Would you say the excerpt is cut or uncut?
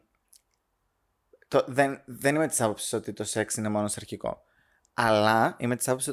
uncut